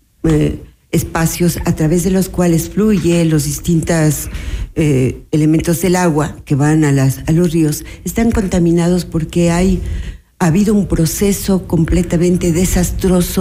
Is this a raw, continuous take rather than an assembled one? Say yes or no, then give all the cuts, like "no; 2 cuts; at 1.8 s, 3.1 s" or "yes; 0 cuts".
yes; 0 cuts